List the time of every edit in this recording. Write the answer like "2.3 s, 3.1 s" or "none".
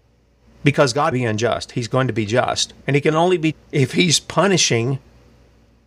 1.1 s, 2.8 s, 3.5 s